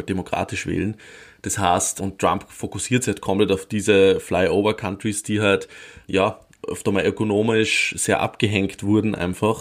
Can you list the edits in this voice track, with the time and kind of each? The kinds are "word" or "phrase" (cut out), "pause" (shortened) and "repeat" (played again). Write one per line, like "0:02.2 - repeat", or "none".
0:02.0 - word
0:06.0 - word